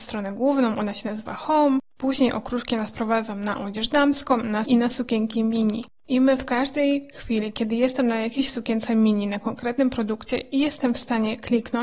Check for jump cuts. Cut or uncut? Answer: cut